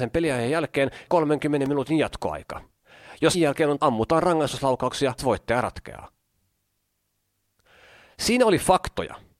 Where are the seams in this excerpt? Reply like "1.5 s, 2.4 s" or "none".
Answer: 1.1 s, 3.3 s, 3.8 s, 5.2 s